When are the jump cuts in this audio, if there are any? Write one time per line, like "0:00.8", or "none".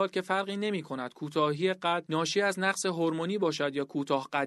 none